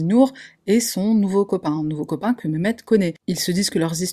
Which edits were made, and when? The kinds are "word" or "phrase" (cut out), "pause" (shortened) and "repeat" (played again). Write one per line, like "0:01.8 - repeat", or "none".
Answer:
none